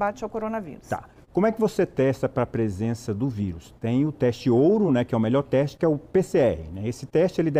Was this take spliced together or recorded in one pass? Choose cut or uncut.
uncut